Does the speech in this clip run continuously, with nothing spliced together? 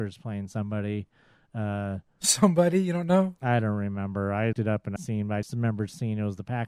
no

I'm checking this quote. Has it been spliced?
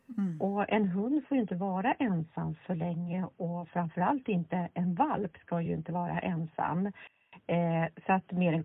no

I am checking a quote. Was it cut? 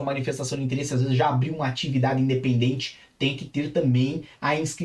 no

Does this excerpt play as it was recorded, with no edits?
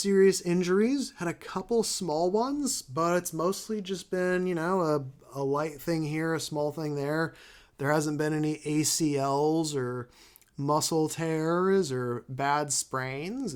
yes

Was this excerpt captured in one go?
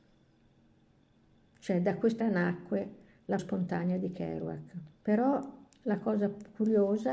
no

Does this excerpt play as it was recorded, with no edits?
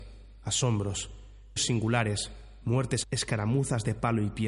no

